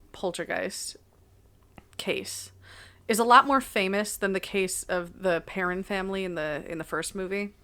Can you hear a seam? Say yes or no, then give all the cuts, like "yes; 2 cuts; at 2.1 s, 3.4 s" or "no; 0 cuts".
no; 0 cuts